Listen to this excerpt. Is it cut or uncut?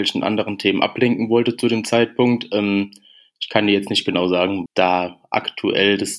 cut